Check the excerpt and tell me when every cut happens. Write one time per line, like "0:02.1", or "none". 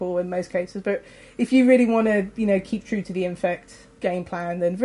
none